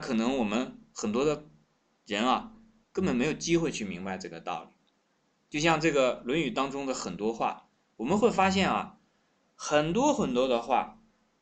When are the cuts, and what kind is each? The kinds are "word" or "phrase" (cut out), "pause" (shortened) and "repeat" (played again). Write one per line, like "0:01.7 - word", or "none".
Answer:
none

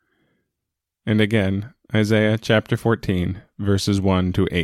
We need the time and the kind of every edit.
none

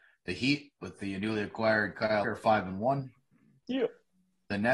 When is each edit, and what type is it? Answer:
0:02.2 - word

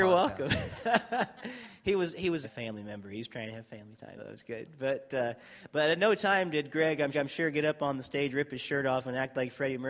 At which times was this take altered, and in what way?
0:02.4 - phrase
0:04.2 - word
0:07.1 - repeat

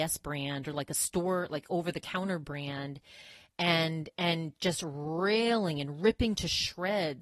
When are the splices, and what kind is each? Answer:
none

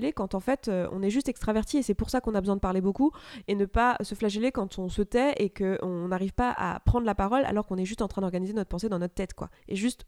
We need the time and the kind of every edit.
none

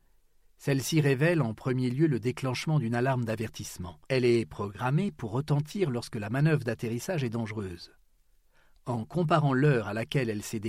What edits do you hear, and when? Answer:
0:04.1 - pause

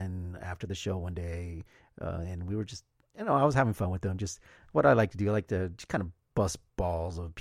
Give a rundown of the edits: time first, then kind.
none

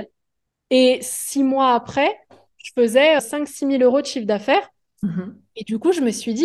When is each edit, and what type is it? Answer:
0:03.2 - word

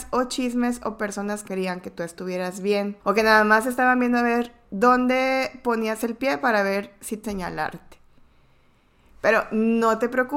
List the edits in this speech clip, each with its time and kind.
0:01.5 - word
0:03.0 - pause
0:07.2 - phrase

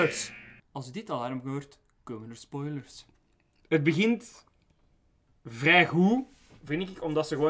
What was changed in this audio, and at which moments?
none

